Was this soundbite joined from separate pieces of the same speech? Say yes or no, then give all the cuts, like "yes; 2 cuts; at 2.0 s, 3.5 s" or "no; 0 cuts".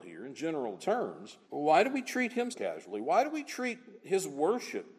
yes; 2 cuts; at 1.4 s, 2.5 s